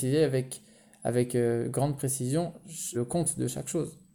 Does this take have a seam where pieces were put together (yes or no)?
yes